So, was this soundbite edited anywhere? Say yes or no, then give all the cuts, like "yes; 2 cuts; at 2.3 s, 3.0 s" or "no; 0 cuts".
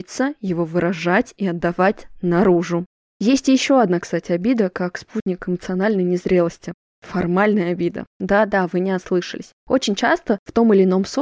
no; 0 cuts